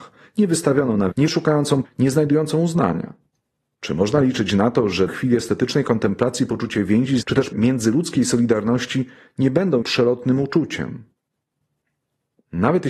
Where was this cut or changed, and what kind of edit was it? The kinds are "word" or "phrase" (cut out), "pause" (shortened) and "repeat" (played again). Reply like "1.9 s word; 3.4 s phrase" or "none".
1.1 s word; 1.8 s word; 5.1 s word; 7.2 s word; 7.5 s word; 9.8 s word